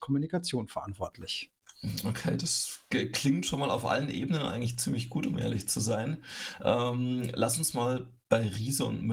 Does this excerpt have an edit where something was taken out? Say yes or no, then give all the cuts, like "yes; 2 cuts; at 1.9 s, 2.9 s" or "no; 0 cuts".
no; 0 cuts